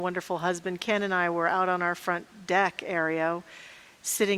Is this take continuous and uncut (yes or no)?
yes